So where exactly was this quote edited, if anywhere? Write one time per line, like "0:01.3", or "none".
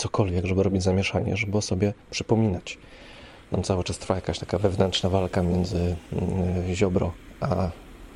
0:02.0